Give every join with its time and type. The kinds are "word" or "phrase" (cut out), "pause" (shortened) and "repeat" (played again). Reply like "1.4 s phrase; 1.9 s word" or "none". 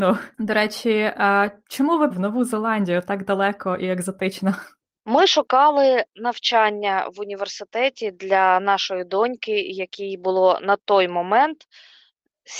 2.1 s phrase